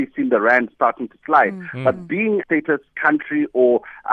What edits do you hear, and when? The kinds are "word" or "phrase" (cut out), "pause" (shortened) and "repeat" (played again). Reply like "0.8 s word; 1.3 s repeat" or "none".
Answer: 2.4 s phrase